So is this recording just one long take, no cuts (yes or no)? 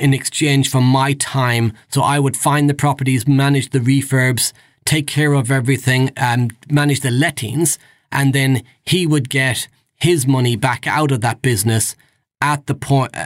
yes